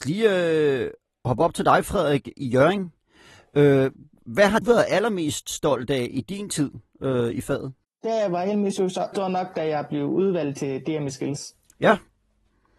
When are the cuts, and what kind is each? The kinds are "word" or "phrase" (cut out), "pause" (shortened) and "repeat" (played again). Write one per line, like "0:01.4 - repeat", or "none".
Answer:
0:04.6 - word
0:09.1 - word